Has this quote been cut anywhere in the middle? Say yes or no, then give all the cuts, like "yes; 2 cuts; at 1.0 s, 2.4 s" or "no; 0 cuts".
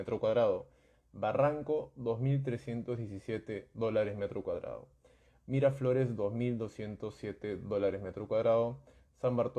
no; 0 cuts